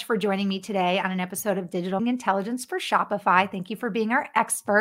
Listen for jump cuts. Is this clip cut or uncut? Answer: cut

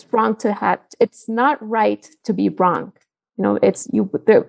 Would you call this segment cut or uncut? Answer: uncut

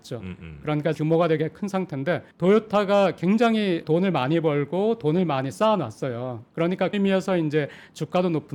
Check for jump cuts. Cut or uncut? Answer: cut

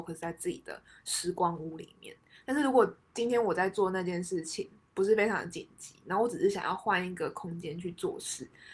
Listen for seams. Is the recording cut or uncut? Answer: uncut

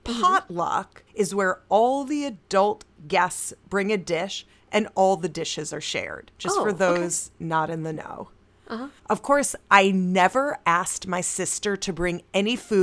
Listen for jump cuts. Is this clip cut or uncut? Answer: cut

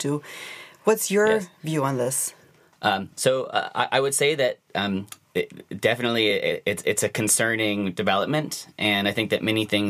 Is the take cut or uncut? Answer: uncut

